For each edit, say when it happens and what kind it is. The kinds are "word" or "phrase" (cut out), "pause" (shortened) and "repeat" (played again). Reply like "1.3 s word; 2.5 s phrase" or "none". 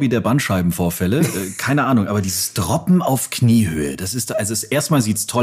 none